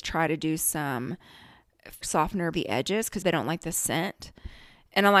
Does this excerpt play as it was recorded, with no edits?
no; 3 cuts; at 2.0 s, 2.5 s, 3.2 s

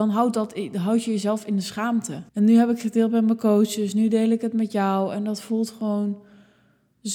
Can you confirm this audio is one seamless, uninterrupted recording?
no; 1 cut; at 2.3 s

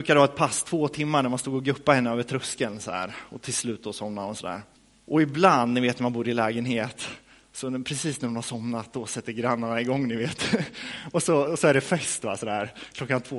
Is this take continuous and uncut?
no; 1 cut; at 4.8 s

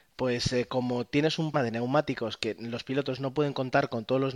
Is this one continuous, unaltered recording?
no; 1 cut; at 1.5 s

